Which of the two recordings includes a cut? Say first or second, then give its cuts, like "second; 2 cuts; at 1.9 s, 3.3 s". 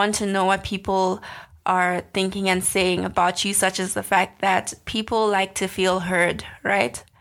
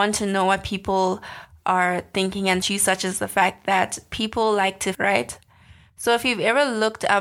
second; 2 cuts; at 2.6 s, 4.9 s